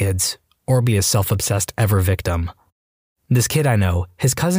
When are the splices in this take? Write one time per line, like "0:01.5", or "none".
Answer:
none